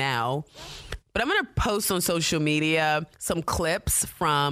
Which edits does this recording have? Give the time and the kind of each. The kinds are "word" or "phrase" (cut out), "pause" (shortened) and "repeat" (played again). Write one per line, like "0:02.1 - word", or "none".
0:03.1 - pause